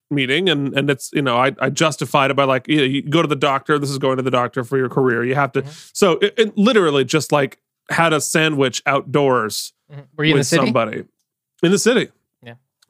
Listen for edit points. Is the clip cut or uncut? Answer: uncut